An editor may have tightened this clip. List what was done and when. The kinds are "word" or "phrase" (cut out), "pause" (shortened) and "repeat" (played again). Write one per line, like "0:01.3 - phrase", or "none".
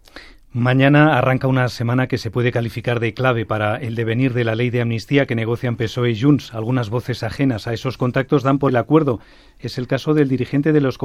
0:08.7 - word